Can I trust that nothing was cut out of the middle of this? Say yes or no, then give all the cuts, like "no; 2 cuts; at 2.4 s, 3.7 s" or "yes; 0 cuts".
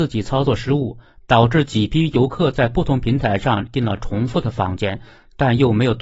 yes; 0 cuts